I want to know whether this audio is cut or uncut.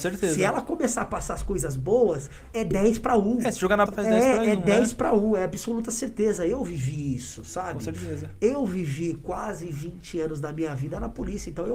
cut